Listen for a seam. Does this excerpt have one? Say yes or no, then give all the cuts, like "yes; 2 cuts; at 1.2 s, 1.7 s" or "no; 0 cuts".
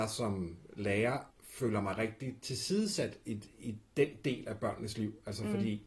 yes; 1 cut; at 1.3 s